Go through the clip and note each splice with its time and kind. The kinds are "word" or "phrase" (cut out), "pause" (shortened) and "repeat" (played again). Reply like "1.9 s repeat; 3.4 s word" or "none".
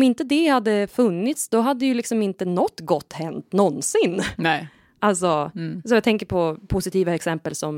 none